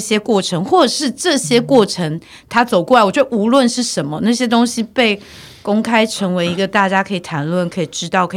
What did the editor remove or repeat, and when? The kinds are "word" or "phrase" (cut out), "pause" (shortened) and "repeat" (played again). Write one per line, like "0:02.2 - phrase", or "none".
none